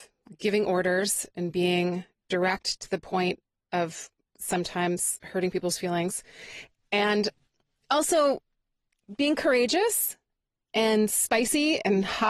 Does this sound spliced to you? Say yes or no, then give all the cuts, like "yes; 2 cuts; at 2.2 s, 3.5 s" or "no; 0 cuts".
no; 0 cuts